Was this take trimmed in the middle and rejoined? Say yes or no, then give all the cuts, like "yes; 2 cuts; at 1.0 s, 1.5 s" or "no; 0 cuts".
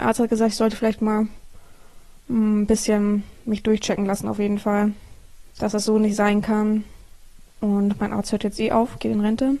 yes; 2 cuts; at 5.5 s, 7.3 s